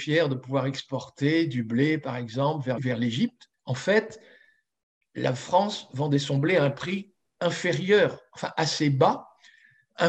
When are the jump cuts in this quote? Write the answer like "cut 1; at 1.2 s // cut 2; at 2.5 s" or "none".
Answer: cut 1; at 2.8 s // cut 2; at 3.5 s